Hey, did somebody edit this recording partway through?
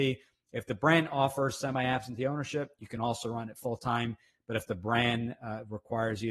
no; 0 cuts

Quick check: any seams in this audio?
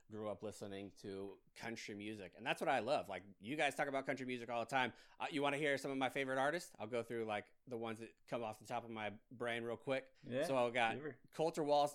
yes; 1 cut; at 10.1 s

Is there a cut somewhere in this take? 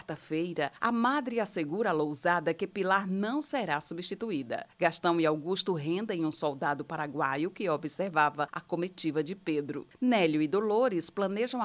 no; 0 cuts

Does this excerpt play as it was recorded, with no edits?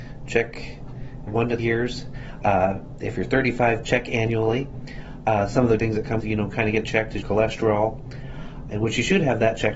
no; 8 cuts; at 1.3 s, 1.6 s, 3.8 s, 5.8 s, 6.2 s, 6.8 s, 7.2 s, 8.7 s

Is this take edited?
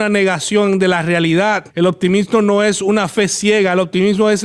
yes; 1 cut; at 1.7 s

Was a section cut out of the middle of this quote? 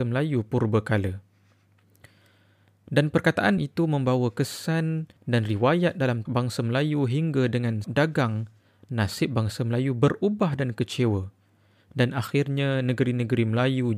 yes; 3 cuts; at 3.6 s, 6.3 s, 7.8 s

